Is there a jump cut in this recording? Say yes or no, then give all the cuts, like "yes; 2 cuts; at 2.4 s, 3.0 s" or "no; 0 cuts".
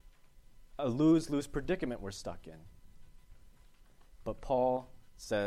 no; 0 cuts